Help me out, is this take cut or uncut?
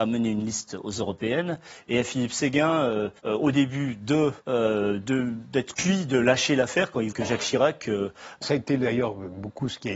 cut